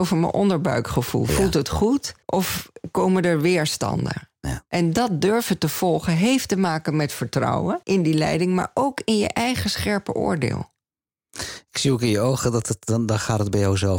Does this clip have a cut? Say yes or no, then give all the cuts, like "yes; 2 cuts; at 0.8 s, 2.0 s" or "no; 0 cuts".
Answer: yes; 2 cuts; at 2.2 s, 7.8 s